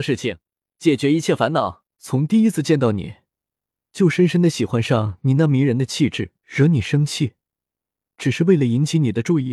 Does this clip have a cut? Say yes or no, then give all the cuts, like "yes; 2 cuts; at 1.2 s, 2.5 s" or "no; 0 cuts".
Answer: yes; 2 cuts; at 1.9 s, 6.4 s